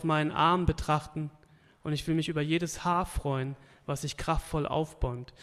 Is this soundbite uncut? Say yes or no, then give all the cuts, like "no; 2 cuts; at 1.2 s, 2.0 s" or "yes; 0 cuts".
yes; 0 cuts